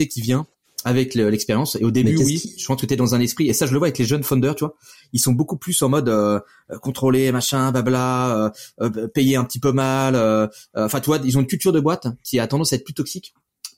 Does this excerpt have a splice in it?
no; 0 cuts

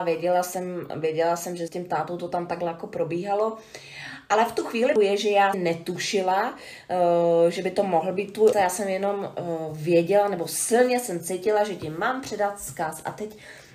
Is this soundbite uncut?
no; 4 cuts; at 1.7 s, 5.0 s, 5.5 s, 8.5 s

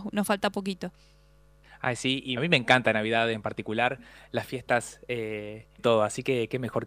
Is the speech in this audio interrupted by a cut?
yes; 2 cuts; at 2.4 s, 5.8 s

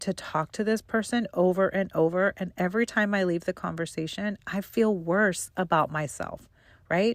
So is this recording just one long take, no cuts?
yes; 0 cuts

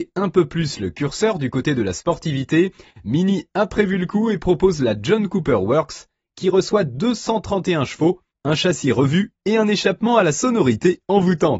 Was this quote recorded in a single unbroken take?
yes; 0 cuts

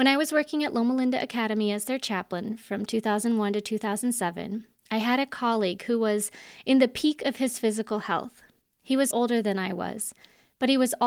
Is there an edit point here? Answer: yes; 1 cut; at 9.1 s

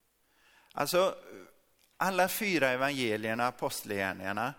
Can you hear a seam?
no; 0 cuts

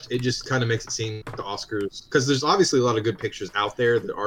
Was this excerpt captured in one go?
no; 1 cut; at 1.2 s

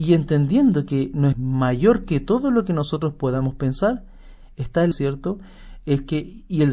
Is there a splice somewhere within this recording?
yes; 2 cuts; at 1.3 s, 4.9 s

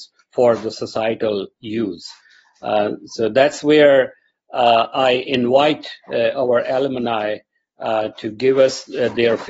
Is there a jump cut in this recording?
no; 0 cuts

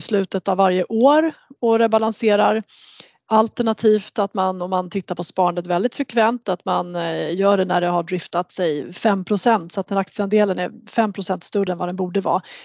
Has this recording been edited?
no; 0 cuts

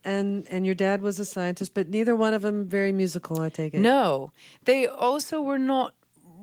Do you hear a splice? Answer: no; 0 cuts

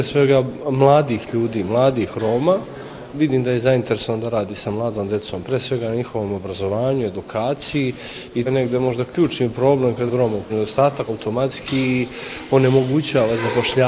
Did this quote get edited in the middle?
yes; 5 cuts; at 3.1 s, 8.5 s, 10.1 s, 10.5 s, 11.1 s

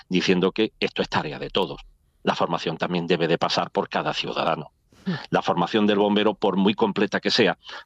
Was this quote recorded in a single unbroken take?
yes; 0 cuts

